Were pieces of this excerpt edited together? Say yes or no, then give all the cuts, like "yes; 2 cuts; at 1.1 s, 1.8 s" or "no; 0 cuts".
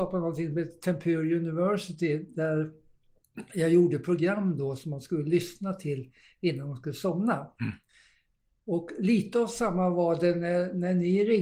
no; 0 cuts